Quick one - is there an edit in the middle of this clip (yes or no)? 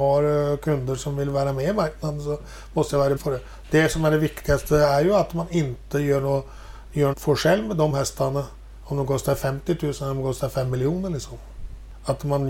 yes